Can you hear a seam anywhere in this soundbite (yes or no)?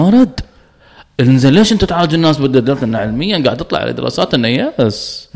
no